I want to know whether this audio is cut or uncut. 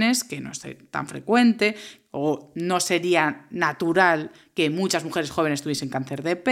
uncut